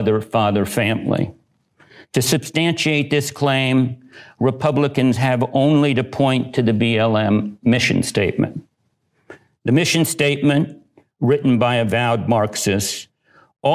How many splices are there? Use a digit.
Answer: 0